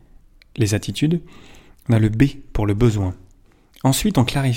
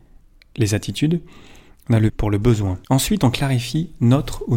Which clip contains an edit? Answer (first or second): second